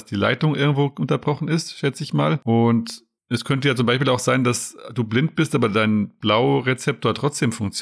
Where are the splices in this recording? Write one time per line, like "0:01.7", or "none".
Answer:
0:03.2